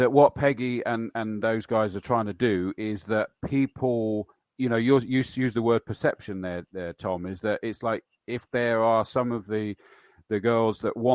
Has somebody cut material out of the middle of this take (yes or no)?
no